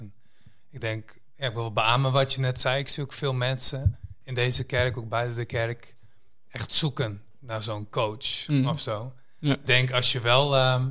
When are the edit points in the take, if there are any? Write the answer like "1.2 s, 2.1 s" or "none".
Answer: 9.7 s